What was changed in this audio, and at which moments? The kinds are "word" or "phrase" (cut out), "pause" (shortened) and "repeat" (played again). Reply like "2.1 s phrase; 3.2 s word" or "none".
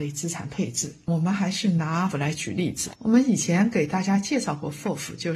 2.1 s word